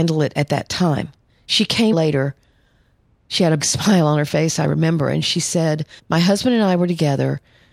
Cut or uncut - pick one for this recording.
cut